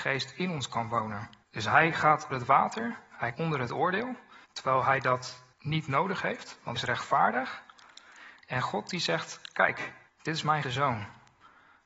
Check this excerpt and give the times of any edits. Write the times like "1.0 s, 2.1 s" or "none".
1.4 s, 2.3 s, 3.3 s, 4.4 s, 5.5 s, 6.7 s, 10.1 s, 10.6 s